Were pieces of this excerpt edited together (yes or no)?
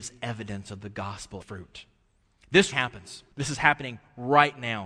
yes